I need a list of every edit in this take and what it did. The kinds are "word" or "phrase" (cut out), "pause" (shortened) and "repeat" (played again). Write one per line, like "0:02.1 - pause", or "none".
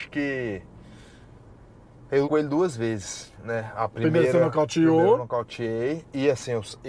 0:02.2 - word